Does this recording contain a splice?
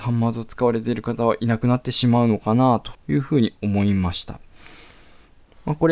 yes; 1 cut; at 2.9 s

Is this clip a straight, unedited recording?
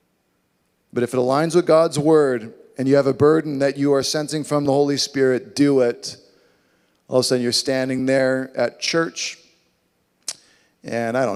yes; 0 cuts

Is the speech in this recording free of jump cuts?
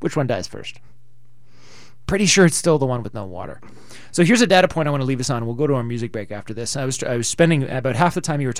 yes; 0 cuts

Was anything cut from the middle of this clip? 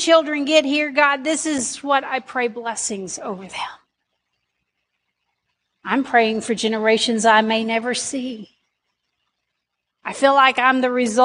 no; 0 cuts

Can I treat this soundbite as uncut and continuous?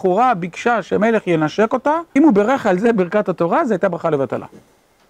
no; 1 cut; at 2.2 s

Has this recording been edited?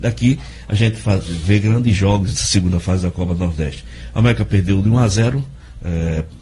yes; 1 cut; at 2.4 s

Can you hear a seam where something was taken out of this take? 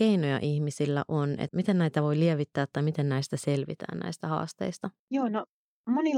yes; 1 cut; at 5.0 s

